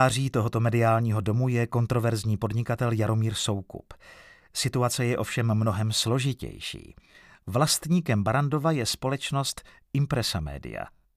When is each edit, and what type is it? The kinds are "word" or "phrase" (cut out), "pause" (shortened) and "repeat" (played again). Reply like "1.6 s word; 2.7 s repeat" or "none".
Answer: none